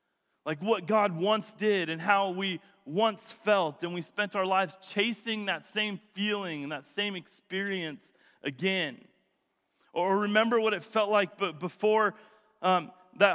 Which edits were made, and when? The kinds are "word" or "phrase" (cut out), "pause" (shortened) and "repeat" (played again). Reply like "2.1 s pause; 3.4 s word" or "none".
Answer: none